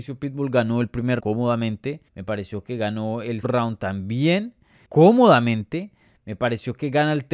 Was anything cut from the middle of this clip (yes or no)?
yes